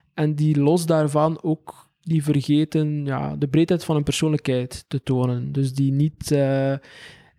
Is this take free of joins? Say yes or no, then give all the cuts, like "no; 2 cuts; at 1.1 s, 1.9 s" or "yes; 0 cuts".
yes; 0 cuts